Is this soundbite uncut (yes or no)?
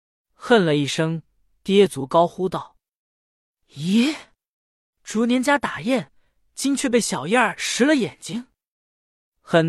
yes